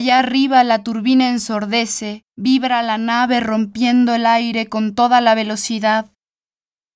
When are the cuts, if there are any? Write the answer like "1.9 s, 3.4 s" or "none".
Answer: 2.3 s